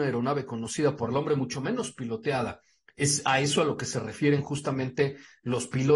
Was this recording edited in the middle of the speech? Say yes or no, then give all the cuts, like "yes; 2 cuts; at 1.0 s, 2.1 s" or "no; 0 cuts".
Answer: no; 0 cuts